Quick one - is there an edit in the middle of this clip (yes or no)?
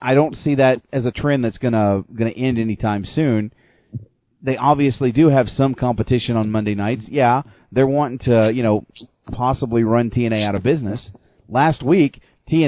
no